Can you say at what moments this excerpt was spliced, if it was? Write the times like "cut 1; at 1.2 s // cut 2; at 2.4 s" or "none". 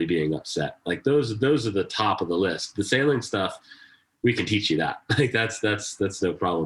none